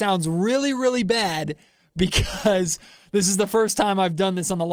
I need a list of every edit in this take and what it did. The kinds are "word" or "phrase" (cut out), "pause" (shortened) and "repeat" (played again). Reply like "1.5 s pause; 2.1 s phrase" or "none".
none